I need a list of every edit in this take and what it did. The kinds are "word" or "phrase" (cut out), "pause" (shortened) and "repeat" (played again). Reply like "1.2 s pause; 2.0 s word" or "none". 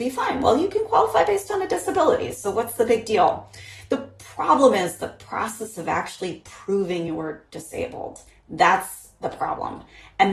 none